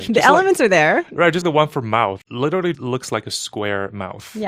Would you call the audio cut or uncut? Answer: cut